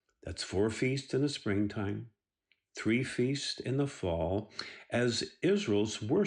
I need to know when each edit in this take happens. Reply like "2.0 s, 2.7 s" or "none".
none